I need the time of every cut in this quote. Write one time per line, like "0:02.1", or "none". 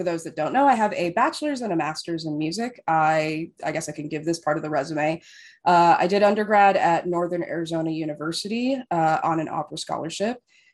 none